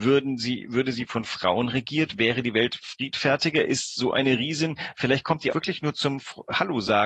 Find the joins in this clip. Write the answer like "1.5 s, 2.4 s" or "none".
5.5 s